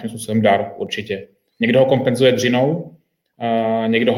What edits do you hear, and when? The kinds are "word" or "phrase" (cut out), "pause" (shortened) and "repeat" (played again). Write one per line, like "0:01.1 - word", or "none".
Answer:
none